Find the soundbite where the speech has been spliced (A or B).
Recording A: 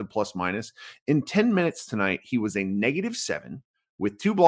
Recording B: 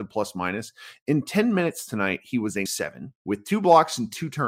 B